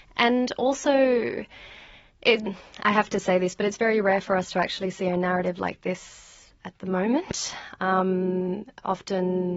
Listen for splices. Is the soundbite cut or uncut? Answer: uncut